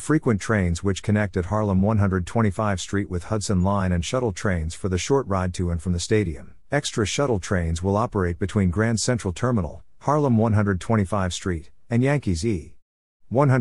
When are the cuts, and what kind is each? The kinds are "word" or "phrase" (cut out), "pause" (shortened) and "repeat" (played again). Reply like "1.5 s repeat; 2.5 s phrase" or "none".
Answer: 6.6 s pause